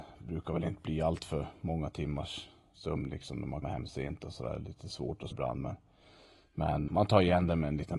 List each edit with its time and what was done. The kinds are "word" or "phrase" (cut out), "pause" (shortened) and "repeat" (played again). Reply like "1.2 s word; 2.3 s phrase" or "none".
3.6 s word; 5.3 s word; 6.9 s word

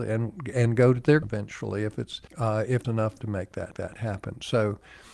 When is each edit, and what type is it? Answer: 1.2 s word; 2.3 s pause; 2.8 s word; 3.2 s word; 3.7 s repeat

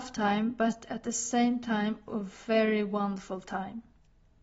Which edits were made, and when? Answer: 2.1 s word

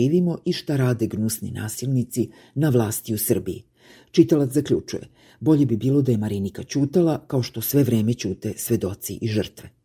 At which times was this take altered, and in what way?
none

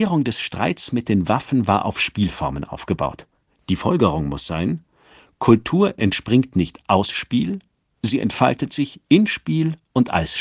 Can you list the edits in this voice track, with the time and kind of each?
none

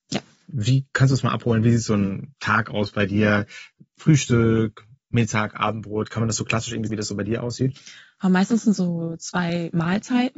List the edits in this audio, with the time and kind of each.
6.9 s word; 8.8 s word

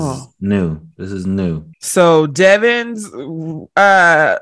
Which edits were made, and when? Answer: 1.7 s pause

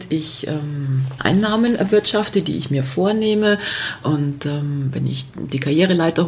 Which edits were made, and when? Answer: 1.2 s word

